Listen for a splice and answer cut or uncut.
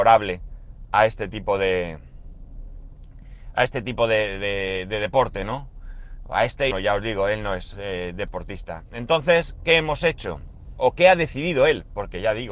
cut